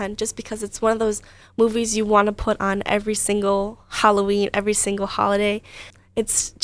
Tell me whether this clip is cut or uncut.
uncut